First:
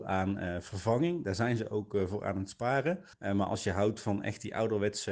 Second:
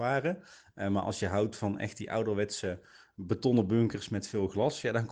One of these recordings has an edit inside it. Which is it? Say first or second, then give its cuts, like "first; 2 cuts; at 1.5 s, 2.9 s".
first; 1 cut; at 3.1 s